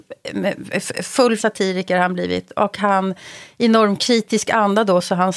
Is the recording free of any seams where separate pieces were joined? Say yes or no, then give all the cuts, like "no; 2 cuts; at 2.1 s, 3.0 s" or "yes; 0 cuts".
no; 1 cut; at 1.4 s